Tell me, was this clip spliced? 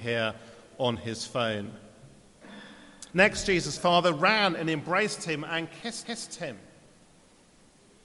yes; 3 cuts; at 3.1 s, 3.8 s, 6.0 s

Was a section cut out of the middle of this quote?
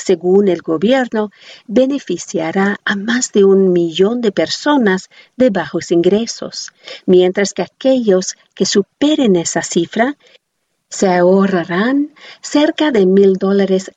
no; 0 cuts

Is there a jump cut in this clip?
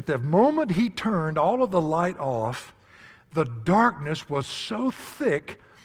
no; 0 cuts

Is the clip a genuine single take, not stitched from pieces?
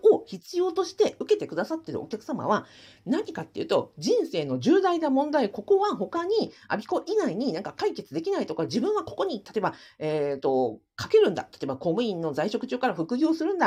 yes; 0 cuts

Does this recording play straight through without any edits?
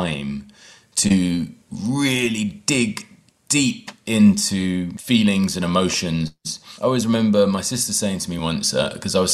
yes; 0 cuts

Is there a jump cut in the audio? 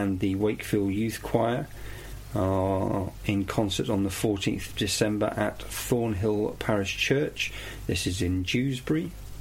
no; 0 cuts

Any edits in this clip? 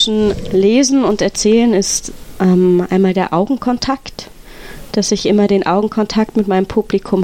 no; 0 cuts

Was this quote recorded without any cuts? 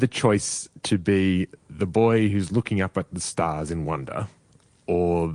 yes; 0 cuts

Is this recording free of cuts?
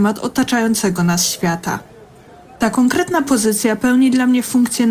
yes; 0 cuts

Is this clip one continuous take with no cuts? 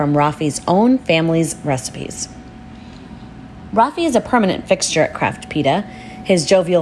yes; 0 cuts

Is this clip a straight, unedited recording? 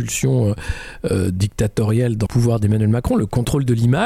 no; 1 cut; at 2.3 s

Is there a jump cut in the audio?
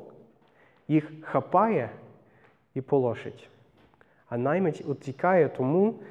no; 0 cuts

